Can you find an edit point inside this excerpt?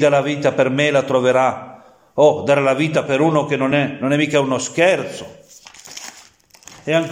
no; 0 cuts

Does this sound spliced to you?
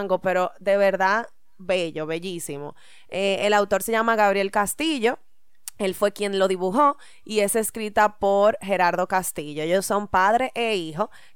no; 0 cuts

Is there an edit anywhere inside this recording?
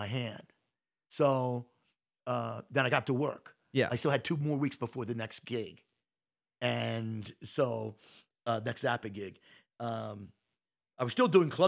yes; 1 cut; at 3.0 s

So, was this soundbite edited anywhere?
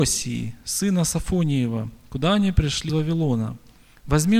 yes; 1 cut; at 2.9 s

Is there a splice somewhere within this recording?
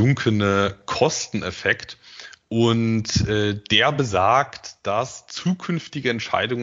no; 0 cuts

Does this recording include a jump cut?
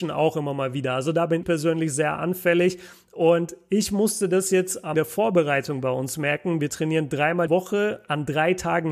yes; 3 cuts; at 1.4 s, 4.9 s, 7.5 s

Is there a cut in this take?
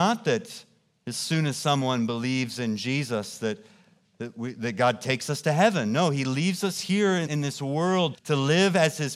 yes; 2 cuts; at 7.3 s, 8.1 s

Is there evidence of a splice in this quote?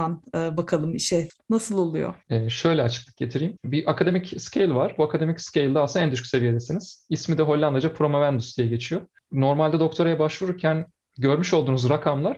no; 0 cuts

